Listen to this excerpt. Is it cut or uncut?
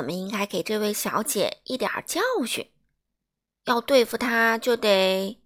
uncut